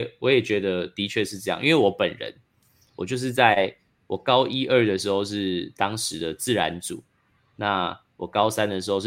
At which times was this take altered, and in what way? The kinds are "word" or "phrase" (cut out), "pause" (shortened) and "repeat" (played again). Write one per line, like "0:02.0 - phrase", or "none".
none